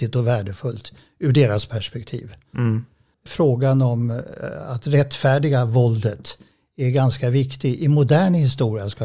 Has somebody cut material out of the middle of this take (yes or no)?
no